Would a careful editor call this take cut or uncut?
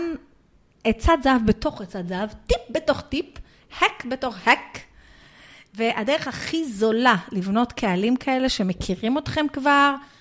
uncut